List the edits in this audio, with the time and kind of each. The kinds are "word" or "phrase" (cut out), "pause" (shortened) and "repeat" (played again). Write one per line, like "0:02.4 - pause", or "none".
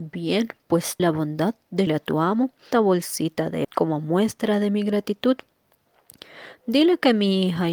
0:01.0 - word
0:01.9 - word
0:02.7 - word
0:03.6 - word